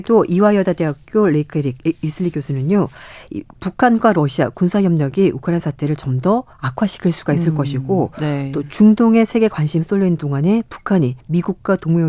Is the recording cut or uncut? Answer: cut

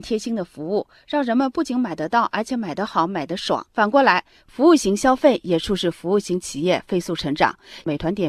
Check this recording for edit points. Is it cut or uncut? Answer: cut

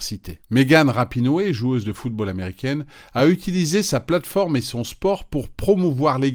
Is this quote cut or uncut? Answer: uncut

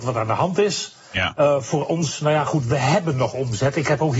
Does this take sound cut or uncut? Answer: uncut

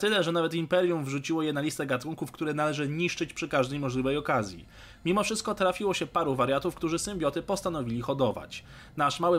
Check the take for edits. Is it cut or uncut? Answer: uncut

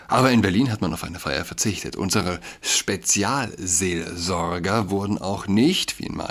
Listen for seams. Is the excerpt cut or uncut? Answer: uncut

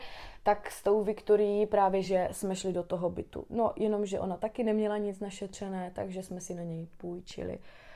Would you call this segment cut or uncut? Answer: uncut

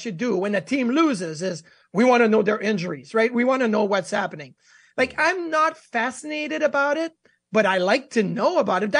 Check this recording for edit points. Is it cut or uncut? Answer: uncut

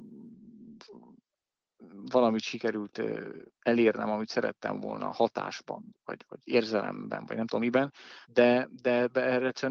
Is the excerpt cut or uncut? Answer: cut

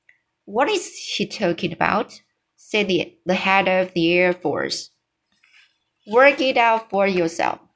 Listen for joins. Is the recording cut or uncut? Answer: uncut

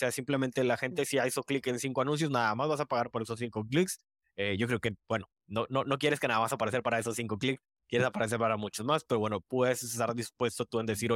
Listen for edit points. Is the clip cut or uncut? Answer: uncut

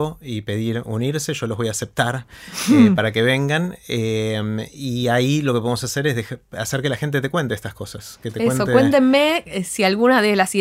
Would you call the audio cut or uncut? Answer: uncut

